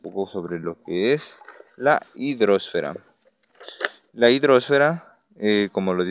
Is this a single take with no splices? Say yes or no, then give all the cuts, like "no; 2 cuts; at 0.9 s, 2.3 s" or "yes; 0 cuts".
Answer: yes; 0 cuts